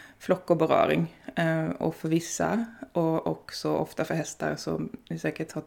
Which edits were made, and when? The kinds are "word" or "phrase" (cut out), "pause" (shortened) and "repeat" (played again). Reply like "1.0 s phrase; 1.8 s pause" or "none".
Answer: none